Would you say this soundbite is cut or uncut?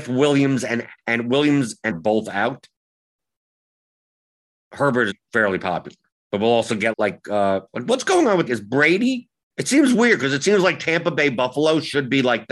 cut